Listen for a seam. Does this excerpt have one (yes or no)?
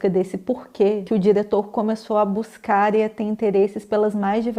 no